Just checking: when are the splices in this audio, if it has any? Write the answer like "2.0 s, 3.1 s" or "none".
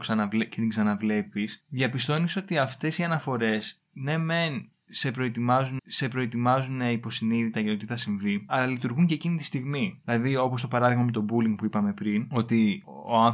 5.8 s